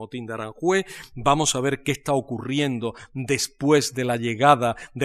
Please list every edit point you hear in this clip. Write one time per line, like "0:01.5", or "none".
none